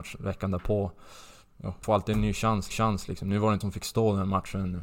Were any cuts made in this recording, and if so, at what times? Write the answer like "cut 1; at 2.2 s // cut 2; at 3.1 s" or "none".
cut 1; at 1.8 s // cut 2; at 2.7 s // cut 3; at 3.6 s

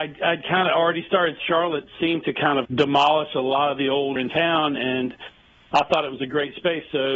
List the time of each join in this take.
cut 1; at 1.4 s // cut 2; at 2.6 s // cut 3; at 4.2 s

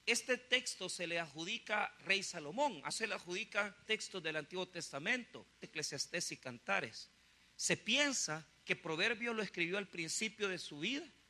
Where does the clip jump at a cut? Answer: cut 1; at 2.0 s // cut 2; at 2.9 s // cut 3; at 3.9 s // cut 4; at 5.6 s

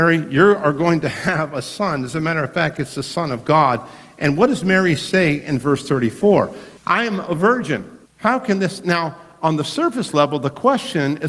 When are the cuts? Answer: cut 1; at 6.8 s // cut 2; at 8.1 s

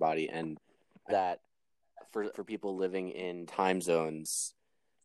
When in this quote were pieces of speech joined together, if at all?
cut 1; at 1.1 s // cut 2; at 2.3 s // cut 3; at 3.5 s

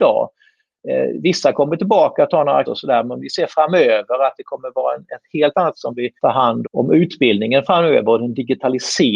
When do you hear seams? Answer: cut 1; at 2.7 s // cut 2; at 5.7 s // cut 3; at 6.2 s // cut 4; at 6.6 s

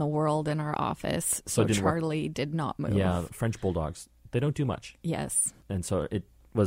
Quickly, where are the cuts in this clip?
cut 1; at 5.6 s

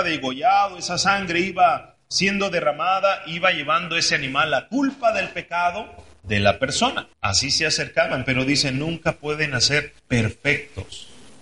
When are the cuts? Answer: cut 1; at 7.1 s // cut 2; at 10.0 s

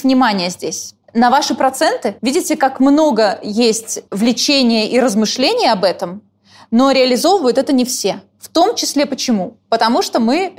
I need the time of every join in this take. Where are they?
cut 1; at 1.0 s // cut 2; at 2.2 s // cut 3; at 4.1 s // cut 4; at 9.6 s

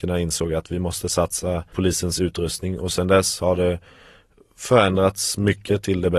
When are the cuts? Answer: cut 1; at 1.7 s

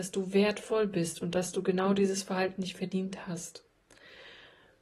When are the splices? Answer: none

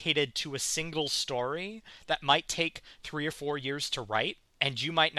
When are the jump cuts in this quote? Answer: none

